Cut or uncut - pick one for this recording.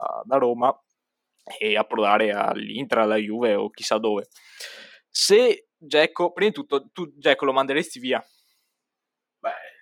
uncut